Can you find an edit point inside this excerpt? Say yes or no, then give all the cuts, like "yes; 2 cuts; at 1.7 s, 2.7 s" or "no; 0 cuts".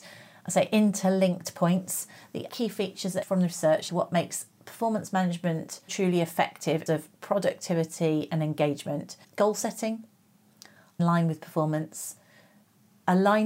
yes; 7 cuts; at 2.5 s, 3.2 s, 3.9 s, 5.9 s, 6.9 s, 9.2 s, 11.0 s